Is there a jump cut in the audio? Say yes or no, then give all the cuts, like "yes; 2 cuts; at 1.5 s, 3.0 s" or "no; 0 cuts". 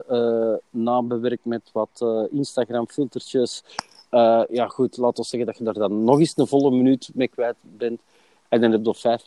no; 0 cuts